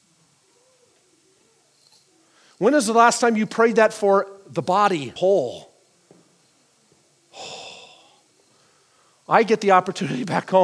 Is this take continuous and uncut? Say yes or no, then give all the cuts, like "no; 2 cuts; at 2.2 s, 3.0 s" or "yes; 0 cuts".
no; 1 cut; at 5.2 s